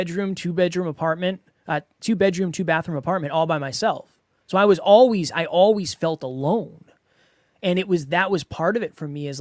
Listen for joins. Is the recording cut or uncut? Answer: uncut